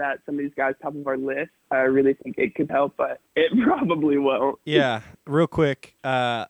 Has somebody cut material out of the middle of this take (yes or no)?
yes